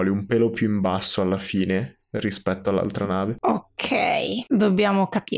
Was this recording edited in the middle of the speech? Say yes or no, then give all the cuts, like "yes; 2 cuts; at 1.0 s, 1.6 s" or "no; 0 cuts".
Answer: no; 0 cuts